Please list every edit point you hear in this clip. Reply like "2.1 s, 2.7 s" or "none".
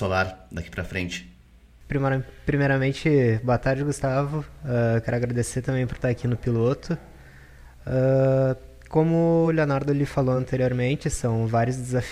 none

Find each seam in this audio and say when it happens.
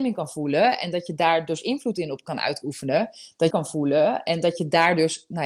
3.5 s

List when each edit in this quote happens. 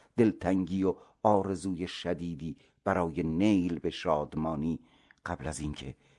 none

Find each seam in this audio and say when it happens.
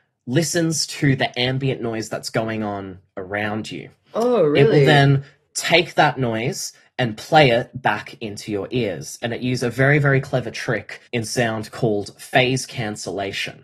11.1 s

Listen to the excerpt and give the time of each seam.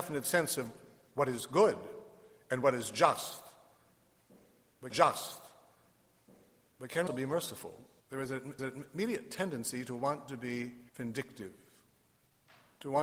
4.9 s, 7.1 s, 8.0 s, 8.6 s, 10.9 s

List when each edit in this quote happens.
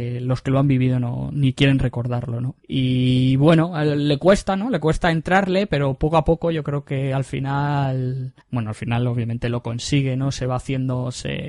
8.4 s

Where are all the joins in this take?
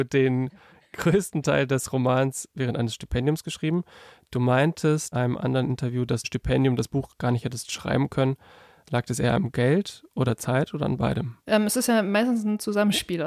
5.1 s, 6.2 s, 10.3 s, 11.4 s

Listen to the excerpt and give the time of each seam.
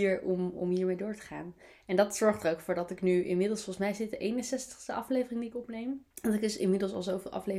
6.1 s

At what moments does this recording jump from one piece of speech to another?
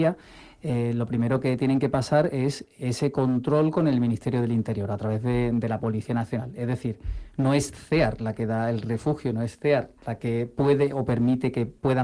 none

